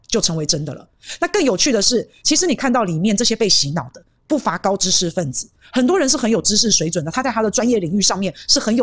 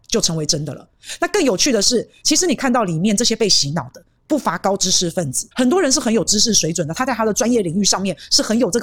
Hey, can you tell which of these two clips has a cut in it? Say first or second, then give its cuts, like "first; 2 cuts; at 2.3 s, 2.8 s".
second; 1 cut; at 5.5 s